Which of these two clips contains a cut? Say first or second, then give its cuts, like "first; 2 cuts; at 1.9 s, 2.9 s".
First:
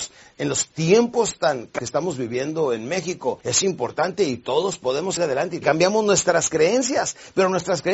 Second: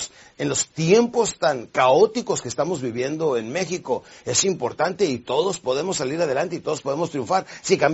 first; 4 cuts; at 1.8 s, 3.4 s, 5.2 s, 5.6 s